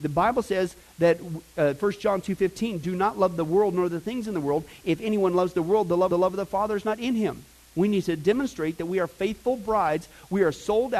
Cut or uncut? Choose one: cut